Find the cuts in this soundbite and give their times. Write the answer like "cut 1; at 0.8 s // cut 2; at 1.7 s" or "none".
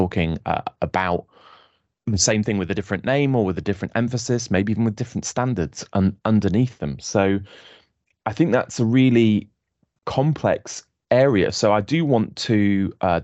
none